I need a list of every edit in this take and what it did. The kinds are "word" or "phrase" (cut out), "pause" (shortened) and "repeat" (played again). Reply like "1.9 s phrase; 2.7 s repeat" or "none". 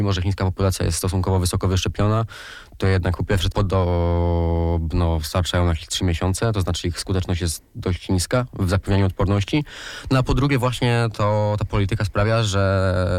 3.5 s word